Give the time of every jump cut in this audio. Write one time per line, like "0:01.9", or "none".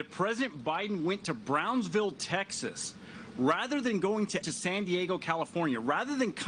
0:04.4